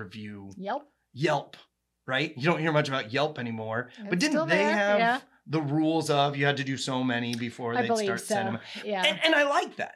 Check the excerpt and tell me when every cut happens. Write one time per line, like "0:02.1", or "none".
none